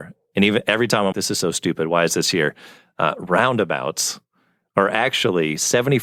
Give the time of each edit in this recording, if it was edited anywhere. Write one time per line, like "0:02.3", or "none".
0:01.1